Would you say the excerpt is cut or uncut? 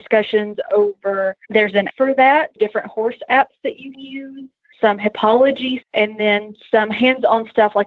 cut